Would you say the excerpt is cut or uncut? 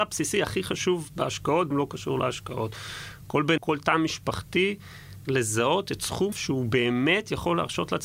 cut